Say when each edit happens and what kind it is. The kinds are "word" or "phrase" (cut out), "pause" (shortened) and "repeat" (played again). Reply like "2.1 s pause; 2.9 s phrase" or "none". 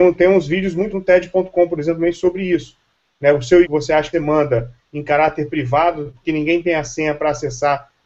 0.9 s word; 3.6 s word; 4.1 s word